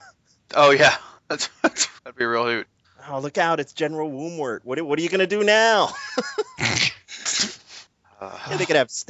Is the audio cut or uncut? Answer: cut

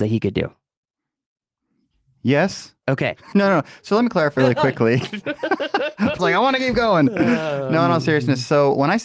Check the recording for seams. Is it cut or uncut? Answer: cut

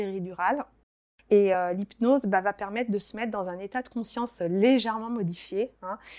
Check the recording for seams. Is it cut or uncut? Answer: uncut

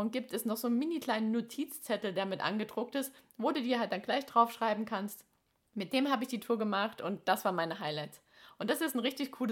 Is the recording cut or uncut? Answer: uncut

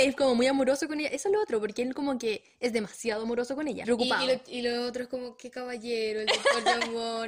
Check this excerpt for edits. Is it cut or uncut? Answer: cut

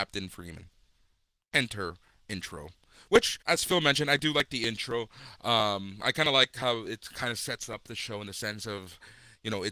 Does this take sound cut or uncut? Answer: cut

